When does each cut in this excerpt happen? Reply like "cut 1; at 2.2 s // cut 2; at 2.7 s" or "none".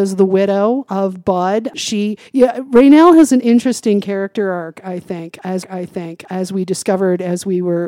cut 1; at 2.3 s // cut 2; at 5.6 s